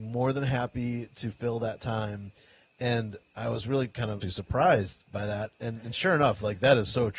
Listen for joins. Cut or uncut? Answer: cut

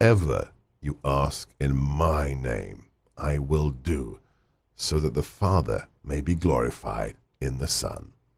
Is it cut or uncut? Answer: uncut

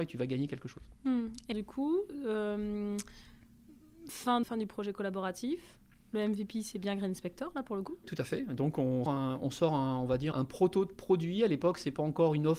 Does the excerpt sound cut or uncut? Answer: cut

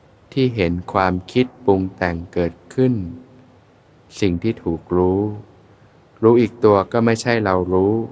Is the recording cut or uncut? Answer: uncut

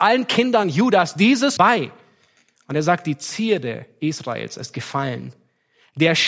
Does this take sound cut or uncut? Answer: cut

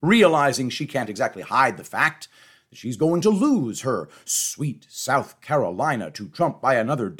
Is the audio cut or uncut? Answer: uncut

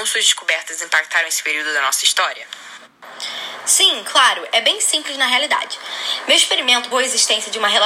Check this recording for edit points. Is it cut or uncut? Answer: cut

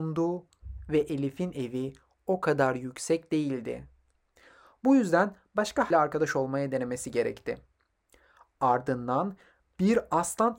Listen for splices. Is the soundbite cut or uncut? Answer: cut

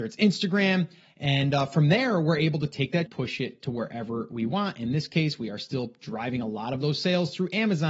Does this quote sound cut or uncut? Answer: cut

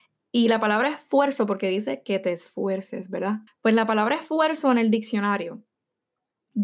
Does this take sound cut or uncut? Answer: cut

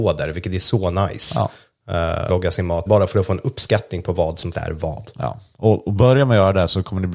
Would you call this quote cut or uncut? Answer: cut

